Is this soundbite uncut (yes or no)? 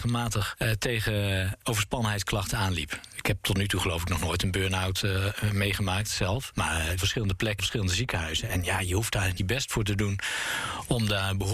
no